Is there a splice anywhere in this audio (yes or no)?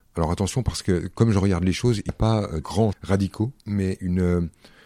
yes